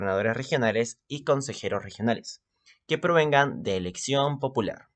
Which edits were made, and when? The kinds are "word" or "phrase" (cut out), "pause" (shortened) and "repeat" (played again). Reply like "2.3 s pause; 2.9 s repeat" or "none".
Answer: none